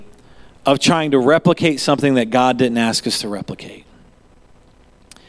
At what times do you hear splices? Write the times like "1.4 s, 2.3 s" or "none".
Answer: none